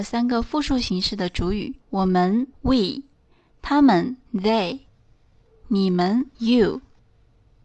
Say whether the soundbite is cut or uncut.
cut